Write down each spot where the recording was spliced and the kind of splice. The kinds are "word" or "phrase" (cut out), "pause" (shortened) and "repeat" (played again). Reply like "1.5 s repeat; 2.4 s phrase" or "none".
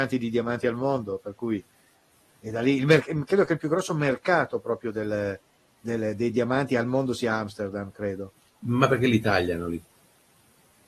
none